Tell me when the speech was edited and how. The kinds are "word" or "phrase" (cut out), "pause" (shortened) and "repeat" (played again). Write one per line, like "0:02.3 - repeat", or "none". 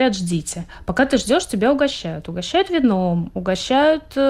none